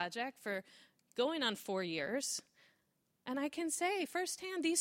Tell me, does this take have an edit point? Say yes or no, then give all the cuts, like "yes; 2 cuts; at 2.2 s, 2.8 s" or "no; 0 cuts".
no; 0 cuts